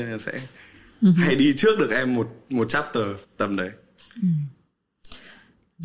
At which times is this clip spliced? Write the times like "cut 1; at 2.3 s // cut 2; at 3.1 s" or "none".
cut 1; at 3.2 s